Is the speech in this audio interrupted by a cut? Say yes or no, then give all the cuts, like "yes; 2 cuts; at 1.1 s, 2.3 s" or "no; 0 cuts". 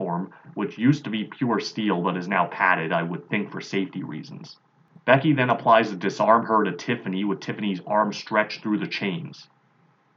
no; 0 cuts